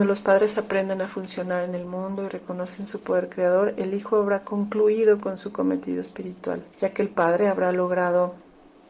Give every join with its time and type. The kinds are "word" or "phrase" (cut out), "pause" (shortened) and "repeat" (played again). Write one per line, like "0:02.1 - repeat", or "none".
0:06.7 - pause

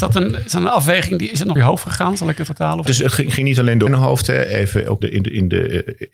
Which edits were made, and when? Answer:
0:01.6 - word
0:02.5 - word
0:02.9 - word
0:03.9 - word
0:05.0 - word

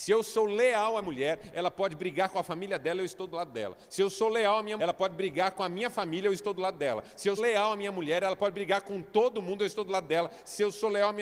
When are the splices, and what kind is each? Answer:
0:01.0 - word
0:04.8 - word
0:07.4 - word

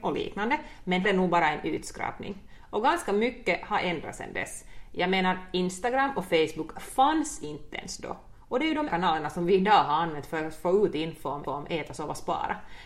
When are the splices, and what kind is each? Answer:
0:01.0 - phrase
0:08.9 - word
0:11.4 - repeat

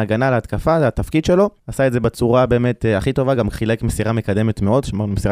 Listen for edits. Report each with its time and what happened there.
0:01.6 - pause

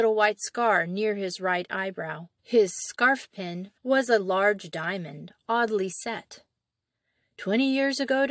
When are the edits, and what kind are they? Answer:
0:02.4 - pause
0:03.8 - pause

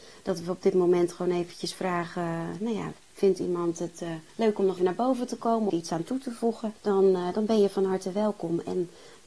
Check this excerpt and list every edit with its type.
0:04.3 - pause
0:04.8 - word
0:05.7 - phrase
0:06.8 - pause

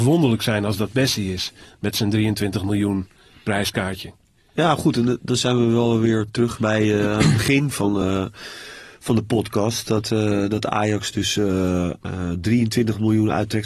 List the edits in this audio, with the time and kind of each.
none

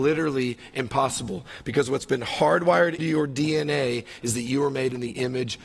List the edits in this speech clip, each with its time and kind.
0:03.0 - word

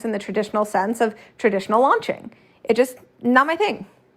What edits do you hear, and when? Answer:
none

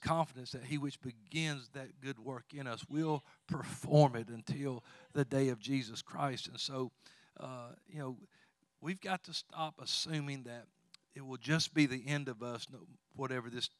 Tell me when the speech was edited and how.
none

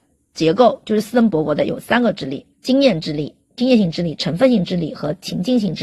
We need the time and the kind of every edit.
0:02.5 - pause

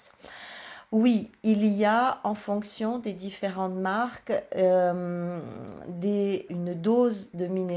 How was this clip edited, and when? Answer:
0:06.5 - word

